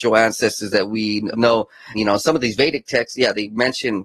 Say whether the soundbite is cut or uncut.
cut